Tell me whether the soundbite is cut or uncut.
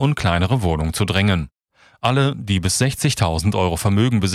uncut